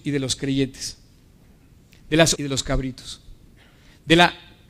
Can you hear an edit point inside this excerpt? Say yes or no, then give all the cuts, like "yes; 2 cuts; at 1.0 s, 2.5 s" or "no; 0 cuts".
yes; 1 cut; at 2.4 s